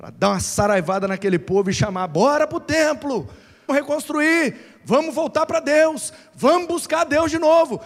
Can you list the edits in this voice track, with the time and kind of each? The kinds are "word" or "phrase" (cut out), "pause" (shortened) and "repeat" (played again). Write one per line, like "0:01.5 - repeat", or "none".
0:03.7 - word